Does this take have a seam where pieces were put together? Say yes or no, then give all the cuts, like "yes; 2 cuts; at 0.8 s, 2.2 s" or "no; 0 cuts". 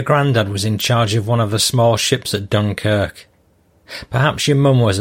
no; 0 cuts